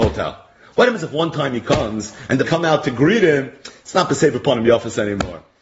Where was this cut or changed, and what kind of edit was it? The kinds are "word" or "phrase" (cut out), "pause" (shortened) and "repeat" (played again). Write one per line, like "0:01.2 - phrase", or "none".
0:02.4 - phrase